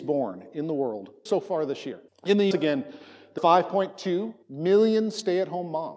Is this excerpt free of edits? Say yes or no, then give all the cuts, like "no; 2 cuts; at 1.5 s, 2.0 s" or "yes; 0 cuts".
no; 5 cuts; at 1.3 s, 2.1 s, 2.5 s, 3.4 s, 4.4 s